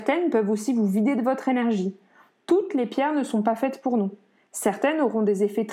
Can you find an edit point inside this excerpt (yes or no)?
no